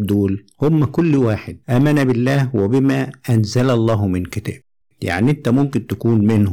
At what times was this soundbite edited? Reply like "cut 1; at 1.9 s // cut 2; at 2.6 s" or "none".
none